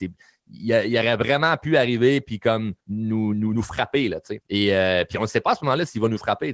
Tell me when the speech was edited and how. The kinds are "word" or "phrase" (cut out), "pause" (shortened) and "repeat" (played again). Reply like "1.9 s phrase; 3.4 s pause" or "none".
2.8 s pause; 4.4 s pause